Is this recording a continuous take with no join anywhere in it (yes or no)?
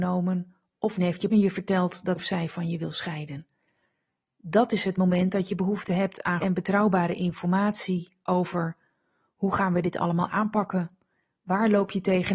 no